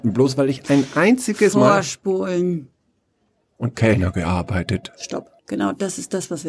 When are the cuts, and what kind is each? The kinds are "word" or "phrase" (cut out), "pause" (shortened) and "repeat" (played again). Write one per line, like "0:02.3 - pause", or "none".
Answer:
0:03.7 - phrase
0:05.4 - pause